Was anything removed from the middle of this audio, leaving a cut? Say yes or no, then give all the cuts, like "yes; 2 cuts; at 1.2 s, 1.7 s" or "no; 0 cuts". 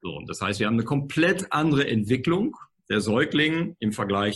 no; 0 cuts